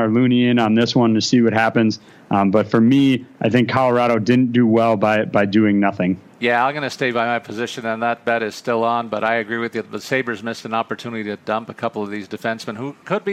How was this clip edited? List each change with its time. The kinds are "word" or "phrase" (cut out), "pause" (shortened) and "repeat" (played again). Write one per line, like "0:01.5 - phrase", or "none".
none